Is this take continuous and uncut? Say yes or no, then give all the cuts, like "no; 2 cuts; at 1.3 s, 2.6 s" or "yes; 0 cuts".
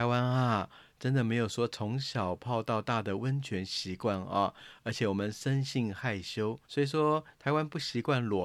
no; 1 cut; at 6.6 s